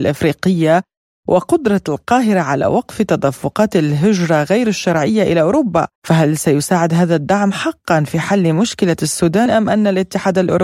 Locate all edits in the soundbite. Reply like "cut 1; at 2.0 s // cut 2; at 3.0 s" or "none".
cut 1; at 6.0 s // cut 2; at 9.5 s